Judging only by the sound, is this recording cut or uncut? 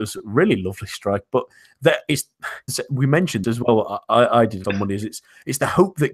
cut